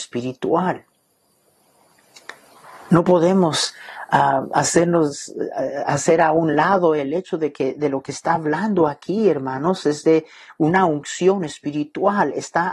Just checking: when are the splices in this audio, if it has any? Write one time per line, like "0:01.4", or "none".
none